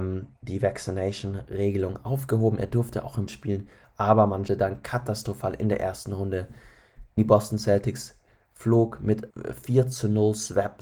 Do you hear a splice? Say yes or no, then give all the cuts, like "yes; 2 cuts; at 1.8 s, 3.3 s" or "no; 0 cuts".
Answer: yes; 4 cuts; at 3.3 s, 4.5 s, 7.2 s, 9.3 s